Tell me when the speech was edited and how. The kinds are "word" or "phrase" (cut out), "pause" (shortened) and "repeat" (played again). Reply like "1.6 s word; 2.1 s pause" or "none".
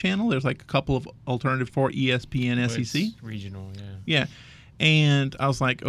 1.7 s word; 3.2 s word

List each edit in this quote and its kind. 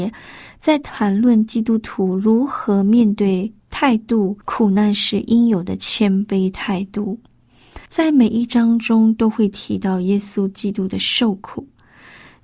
4.4 s pause; 7.9 s pause

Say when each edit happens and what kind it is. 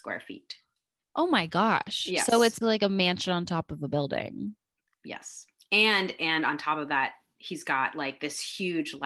2.6 s word

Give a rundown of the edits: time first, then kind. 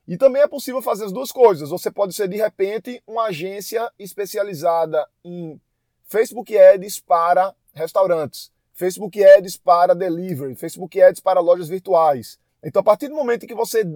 8.6 s pause; 12.5 s pause

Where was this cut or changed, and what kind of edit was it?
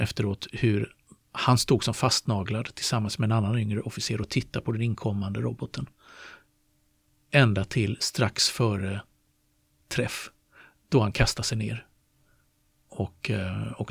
none

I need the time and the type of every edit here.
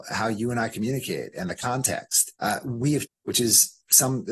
2.4 s pause; 3.1 s word

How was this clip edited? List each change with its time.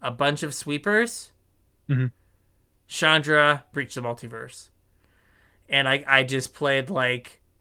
3.7 s phrase

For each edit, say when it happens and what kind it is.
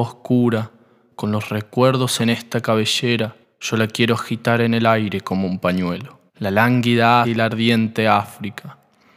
2.2 s word; 3.4 s pause; 6.3 s pause; 7.2 s word

